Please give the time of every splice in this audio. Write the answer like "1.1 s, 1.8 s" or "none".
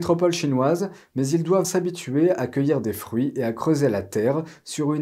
1.6 s